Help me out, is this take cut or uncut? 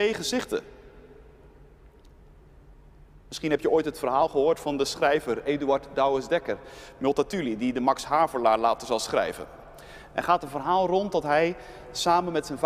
uncut